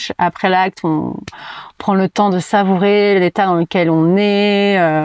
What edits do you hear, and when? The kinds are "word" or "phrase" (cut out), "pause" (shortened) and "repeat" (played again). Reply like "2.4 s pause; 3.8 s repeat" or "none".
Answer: none